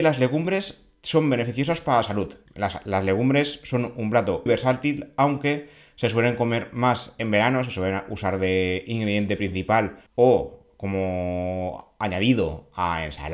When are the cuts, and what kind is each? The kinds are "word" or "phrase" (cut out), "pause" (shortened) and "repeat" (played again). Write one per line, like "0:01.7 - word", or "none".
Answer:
0:02.5 - pause
0:04.5 - word
0:10.1 - pause